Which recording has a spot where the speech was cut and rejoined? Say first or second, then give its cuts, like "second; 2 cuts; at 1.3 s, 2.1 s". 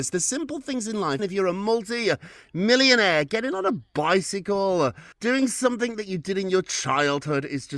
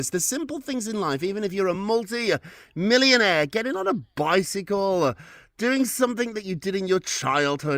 first; 2 cuts; at 1.2 s, 5.1 s